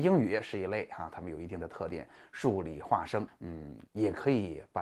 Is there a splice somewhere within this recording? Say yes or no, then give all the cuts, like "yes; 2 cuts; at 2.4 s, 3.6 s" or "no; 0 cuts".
yes; 2 cuts; at 3.3 s, 3.9 s